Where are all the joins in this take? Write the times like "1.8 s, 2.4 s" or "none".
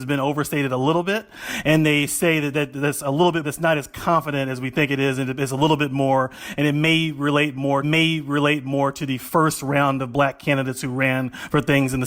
2.5 s, 3.4 s, 7.8 s